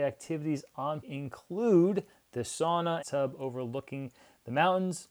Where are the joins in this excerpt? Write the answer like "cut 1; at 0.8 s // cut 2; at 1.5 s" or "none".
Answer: cut 1; at 1.0 s // cut 2; at 3.0 s